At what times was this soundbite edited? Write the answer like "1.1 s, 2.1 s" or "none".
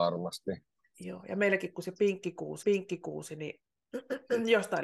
2.6 s